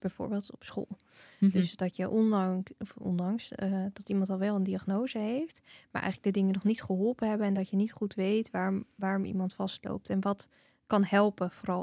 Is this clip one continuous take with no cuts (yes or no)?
yes